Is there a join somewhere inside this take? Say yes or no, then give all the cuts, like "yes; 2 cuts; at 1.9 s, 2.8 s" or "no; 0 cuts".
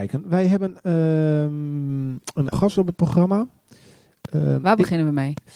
yes; 1 cut; at 2.5 s